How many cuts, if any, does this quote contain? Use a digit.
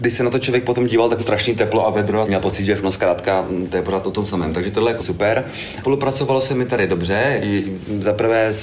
4